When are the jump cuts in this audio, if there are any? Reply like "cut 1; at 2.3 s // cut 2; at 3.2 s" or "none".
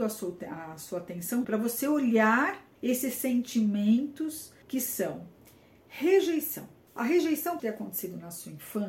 cut 1; at 1.4 s // cut 2; at 2.8 s // cut 3; at 4.6 s // cut 4; at 6.9 s // cut 5; at 7.6 s